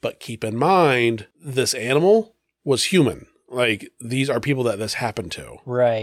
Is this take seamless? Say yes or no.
no